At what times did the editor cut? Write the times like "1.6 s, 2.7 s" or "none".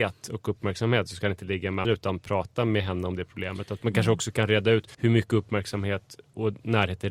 1.8 s, 4.9 s